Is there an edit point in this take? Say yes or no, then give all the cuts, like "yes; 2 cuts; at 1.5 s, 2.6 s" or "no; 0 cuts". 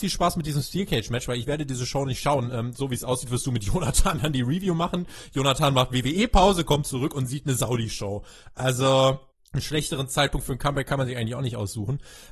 yes; 1 cut; at 9.3 s